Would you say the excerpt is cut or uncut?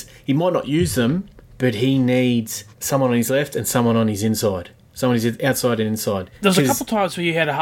cut